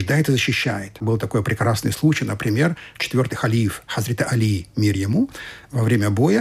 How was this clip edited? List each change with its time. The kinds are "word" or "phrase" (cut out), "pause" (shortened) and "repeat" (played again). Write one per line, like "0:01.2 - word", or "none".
none